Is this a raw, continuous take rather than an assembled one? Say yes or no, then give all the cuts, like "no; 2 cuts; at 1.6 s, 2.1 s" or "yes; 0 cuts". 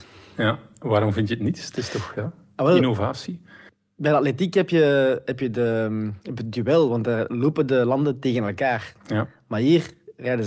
yes; 0 cuts